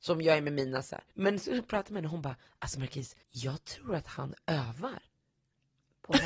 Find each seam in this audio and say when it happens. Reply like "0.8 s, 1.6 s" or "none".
1.1 s, 2.5 s, 3.2 s